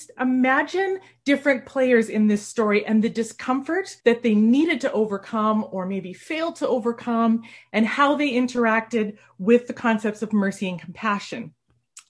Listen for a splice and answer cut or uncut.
cut